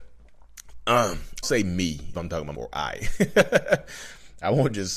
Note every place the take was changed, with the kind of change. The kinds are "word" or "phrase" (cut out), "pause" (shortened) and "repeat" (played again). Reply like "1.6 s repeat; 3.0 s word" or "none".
1.4 s word; 2.1 s word; 2.5 s word